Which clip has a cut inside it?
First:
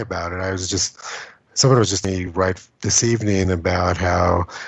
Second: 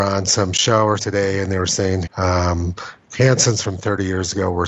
second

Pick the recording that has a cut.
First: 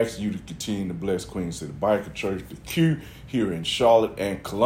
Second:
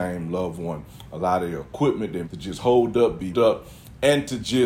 second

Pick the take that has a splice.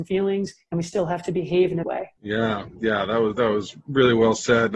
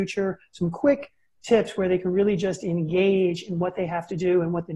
first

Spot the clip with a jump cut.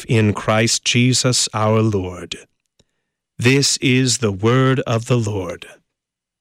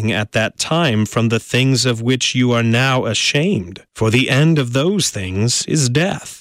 second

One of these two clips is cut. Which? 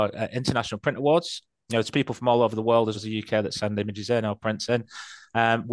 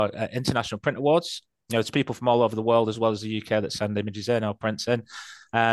first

